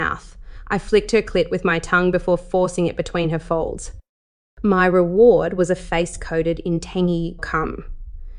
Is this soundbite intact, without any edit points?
no; 1 cut; at 7.4 s

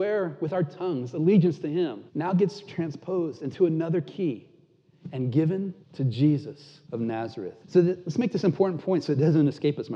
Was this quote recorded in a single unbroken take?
no; 4 cuts; at 2.1 s, 5.8 s, 6.8 s, 7.6 s

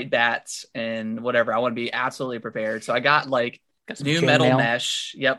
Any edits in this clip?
no; 0 cuts

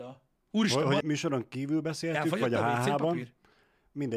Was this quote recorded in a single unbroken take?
no; 1 cut; at 1.0 s

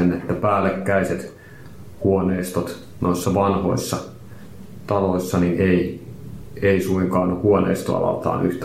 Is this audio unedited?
yes; 0 cuts

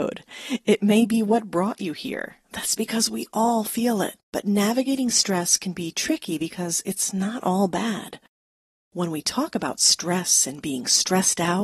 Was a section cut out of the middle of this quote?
yes; 2 cuts; at 2.4 s, 4.2 s

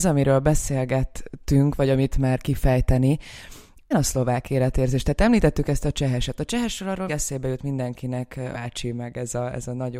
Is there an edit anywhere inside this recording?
yes; 4 cuts; at 2.1 s, 3.9 s, 7.1 s, 8.5 s

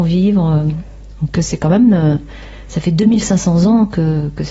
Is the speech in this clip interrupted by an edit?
no; 0 cuts

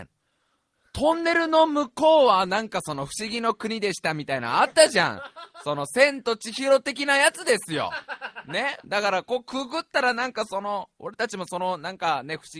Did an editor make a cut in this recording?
no; 0 cuts

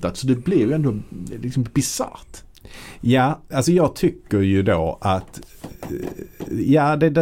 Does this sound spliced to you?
no; 0 cuts

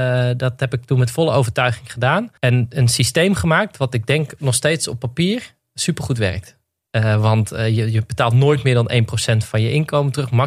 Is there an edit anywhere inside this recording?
yes; 1 cut; at 2.4 s

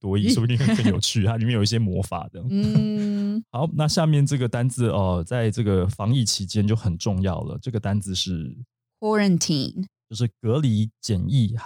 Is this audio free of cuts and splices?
yes; 0 cuts

